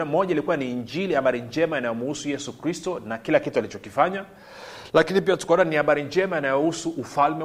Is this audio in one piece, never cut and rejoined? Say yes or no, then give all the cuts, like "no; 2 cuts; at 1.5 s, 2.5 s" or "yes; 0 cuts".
yes; 0 cuts